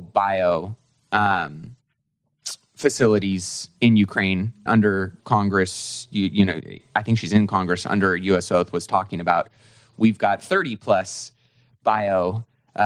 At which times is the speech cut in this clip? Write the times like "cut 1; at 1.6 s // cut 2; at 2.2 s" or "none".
cut 1; at 3.8 s // cut 2; at 4.7 s // cut 3; at 5.2 s